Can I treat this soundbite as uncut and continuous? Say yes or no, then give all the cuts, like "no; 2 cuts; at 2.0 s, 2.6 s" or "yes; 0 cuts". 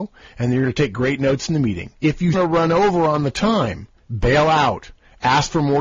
no; 2 cuts; at 2.0 s, 2.3 s